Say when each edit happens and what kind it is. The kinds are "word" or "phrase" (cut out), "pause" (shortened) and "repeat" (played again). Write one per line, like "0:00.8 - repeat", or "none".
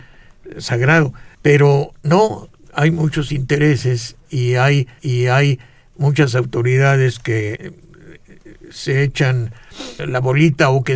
0:01.3 - pause
0:05.0 - repeat
0:07.6 - word
0:10.0 - word